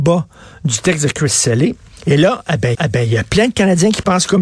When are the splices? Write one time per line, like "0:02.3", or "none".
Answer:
0:02.7